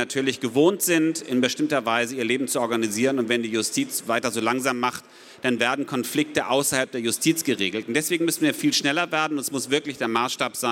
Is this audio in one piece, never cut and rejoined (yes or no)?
yes